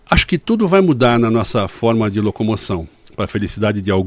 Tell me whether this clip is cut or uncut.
uncut